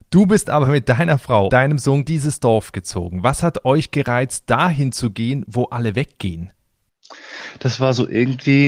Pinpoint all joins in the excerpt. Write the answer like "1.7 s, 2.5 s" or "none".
1.5 s, 2.1 s